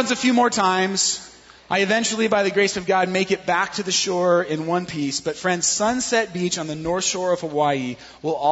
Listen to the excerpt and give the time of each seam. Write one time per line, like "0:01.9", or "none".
0:01.6